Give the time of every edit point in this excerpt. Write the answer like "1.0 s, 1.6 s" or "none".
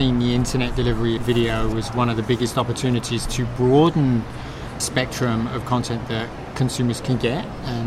1.2 s, 4.8 s